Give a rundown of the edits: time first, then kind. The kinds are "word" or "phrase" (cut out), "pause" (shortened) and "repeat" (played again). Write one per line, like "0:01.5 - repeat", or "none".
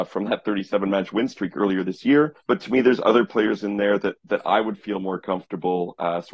0:02.4 - pause